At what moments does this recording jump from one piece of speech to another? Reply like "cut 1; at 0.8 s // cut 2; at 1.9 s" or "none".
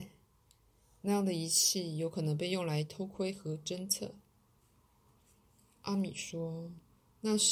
none

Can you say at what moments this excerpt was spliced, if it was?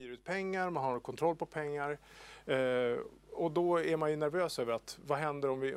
none

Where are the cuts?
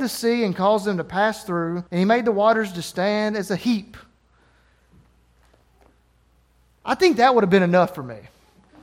cut 1; at 1.9 s

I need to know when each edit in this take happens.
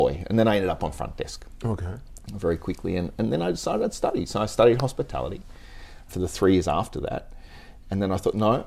cut 1; at 6.1 s

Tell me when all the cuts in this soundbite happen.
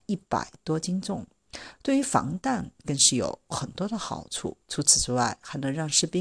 cut 1; at 4.6 s

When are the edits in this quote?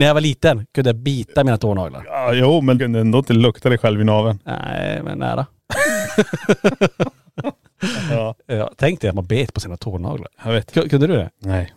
cut 1; at 2.8 s

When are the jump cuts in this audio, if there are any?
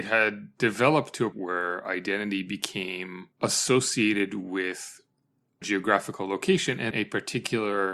cut 1; at 1.3 s // cut 2; at 3.3 s // cut 3; at 5.6 s // cut 4; at 6.9 s

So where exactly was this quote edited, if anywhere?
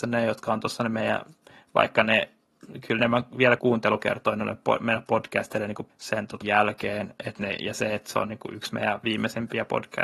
cut 1; at 3.0 s // cut 2; at 3.6 s // cut 3; at 5.9 s // cut 4; at 6.4 s

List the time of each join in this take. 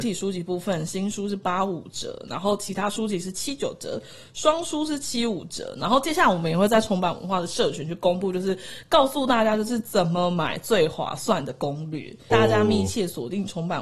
cut 1; at 12.3 s

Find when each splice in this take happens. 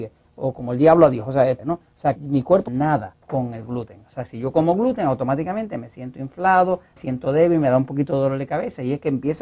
cut 1; at 1.6 s // cut 2; at 2.2 s // cut 3; at 2.7 s // cut 4; at 3.2 s // cut 5; at 7.0 s

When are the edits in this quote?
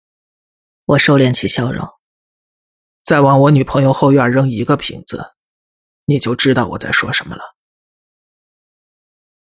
none

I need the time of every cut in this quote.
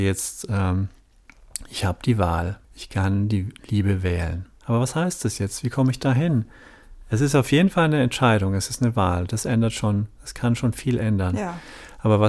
cut 1; at 2.6 s // cut 2; at 4.5 s

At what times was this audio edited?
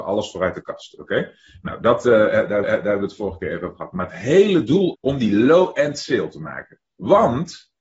cut 1; at 2.6 s // cut 2; at 4.9 s

